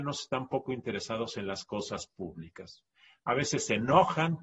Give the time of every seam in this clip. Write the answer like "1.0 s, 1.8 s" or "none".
none